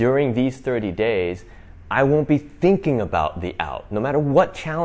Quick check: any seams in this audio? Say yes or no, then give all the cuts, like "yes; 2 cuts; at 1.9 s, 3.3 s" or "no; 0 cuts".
no; 0 cuts